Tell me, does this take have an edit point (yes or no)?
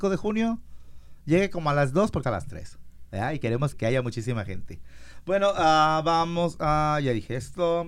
yes